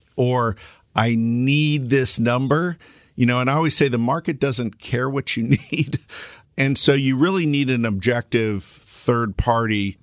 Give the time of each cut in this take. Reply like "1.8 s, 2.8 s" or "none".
none